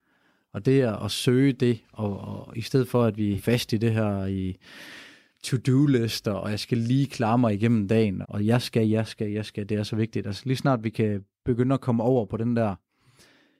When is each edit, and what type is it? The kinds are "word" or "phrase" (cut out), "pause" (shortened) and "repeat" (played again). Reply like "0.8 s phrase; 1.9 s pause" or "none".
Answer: 3.4 s word; 8.2 s word